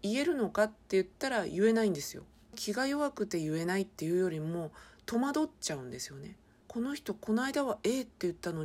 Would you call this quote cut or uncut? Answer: uncut